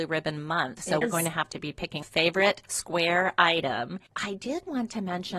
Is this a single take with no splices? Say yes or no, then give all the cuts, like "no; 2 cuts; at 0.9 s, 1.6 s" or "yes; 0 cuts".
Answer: no; 4 cuts; at 1.0 s, 2.0 s, 2.7 s, 4.1 s